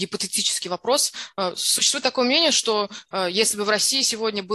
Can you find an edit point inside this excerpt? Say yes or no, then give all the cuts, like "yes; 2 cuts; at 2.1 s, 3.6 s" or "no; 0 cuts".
no; 0 cuts